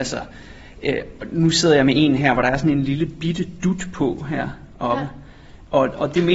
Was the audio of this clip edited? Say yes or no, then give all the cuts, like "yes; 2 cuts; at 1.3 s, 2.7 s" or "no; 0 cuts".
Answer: no; 0 cuts